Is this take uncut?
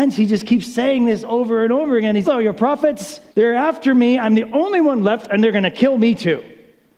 no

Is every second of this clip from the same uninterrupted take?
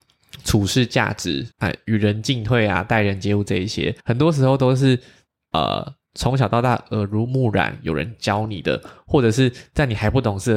no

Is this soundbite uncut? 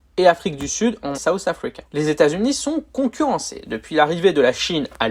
no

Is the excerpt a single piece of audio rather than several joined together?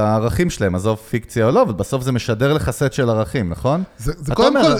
yes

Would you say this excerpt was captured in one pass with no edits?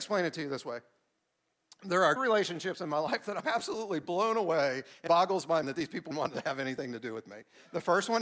no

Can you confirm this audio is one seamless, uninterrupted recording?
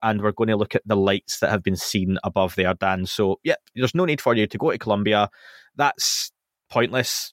yes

